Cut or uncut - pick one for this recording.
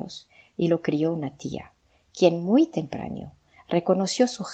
uncut